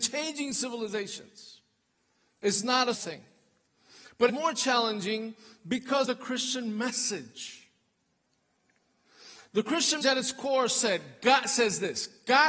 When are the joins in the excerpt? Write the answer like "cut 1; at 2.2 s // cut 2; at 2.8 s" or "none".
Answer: cut 1; at 2.9 s // cut 2; at 4.3 s // cut 3; at 6.0 s // cut 4; at 10.0 s